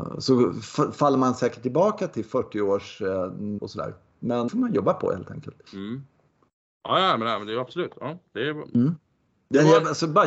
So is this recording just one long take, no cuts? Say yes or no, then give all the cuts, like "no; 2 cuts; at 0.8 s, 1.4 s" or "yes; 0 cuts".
no; 3 cuts; at 3.6 s, 4.5 s, 5.7 s